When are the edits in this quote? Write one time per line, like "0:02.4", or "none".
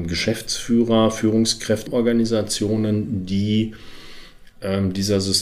0:01.9
0:04.5